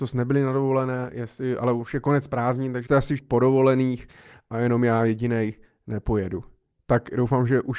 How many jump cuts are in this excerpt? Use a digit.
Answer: 2